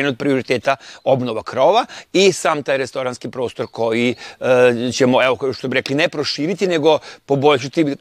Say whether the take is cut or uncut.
uncut